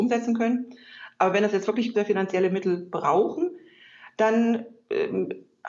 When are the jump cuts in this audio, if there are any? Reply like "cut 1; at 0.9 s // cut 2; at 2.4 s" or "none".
cut 1; at 1.9 s

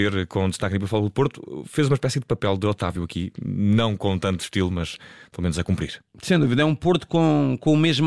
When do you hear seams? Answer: none

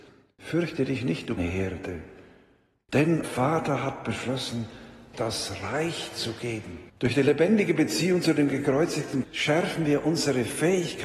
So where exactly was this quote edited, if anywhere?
cut 1; at 1.4 s // cut 2; at 3.2 s // cut 3; at 5.1 s // cut 4; at 6.9 s // cut 5; at 9.2 s

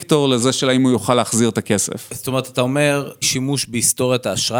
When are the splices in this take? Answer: cut 1; at 3.2 s

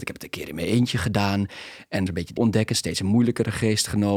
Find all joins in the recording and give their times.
cut 1; at 2.1 s // cut 2; at 2.4 s

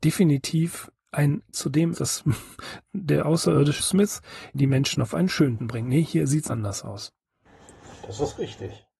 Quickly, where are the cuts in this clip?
cut 1; at 1.5 s // cut 2; at 1.9 s // cut 3; at 3.8 s // cut 4; at 4.5 s // cut 5; at 5.6 s // cut 6; at 6.5 s

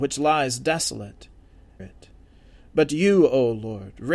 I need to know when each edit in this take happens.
cut 1; at 1.8 s

